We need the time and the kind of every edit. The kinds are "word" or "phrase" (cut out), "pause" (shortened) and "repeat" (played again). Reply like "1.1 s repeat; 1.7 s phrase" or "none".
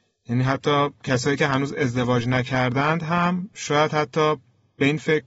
none